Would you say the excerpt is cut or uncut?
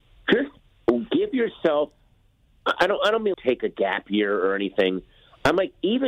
cut